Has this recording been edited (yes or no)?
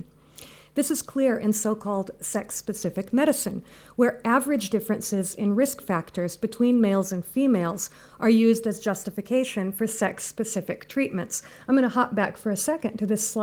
no